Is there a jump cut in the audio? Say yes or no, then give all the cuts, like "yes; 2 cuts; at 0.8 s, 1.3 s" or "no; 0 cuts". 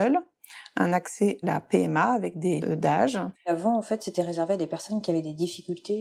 yes; 3 cuts; at 1.4 s, 2.6 s, 3.3 s